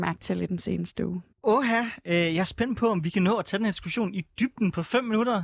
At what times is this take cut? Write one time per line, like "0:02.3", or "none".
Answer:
0:01.3